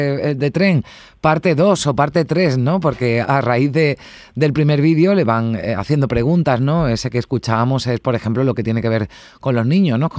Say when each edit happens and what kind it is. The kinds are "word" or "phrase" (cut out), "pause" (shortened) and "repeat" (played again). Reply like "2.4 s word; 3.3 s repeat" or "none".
3.2 s word